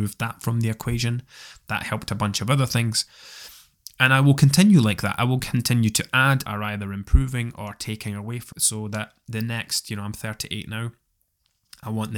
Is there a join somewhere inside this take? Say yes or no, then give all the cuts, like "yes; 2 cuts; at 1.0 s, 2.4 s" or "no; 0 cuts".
yes; 2 cuts; at 6.5 s, 8.5 s